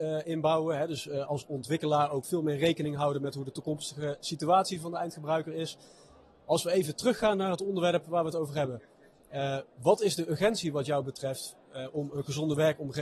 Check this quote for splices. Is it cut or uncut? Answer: uncut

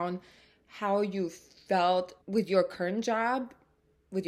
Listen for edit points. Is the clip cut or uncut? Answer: cut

